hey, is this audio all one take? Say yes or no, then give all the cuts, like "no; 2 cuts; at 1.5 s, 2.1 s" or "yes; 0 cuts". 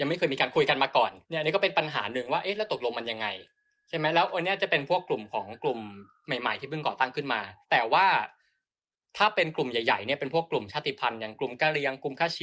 no; 2 cuts; at 1.2 s, 7.6 s